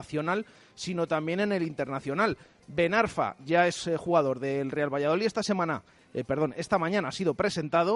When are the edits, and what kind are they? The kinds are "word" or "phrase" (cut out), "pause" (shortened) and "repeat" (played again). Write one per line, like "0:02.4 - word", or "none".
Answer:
none